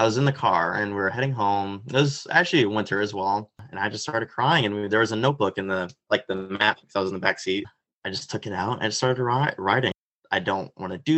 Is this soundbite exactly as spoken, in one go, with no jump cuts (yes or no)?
no